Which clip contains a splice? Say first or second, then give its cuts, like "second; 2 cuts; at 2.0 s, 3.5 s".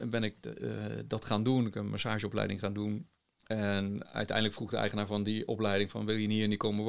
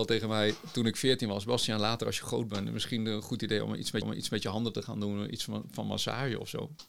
second; 1 cut; at 4.0 s